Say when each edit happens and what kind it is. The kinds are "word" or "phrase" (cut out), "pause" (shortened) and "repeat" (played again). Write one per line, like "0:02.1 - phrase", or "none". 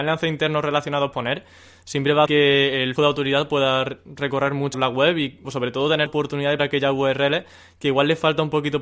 0:01.1 - word
0:02.3 - word
0:03.0 - word
0:04.7 - word
0:05.4 - word
0:06.1 - word
0:06.6 - word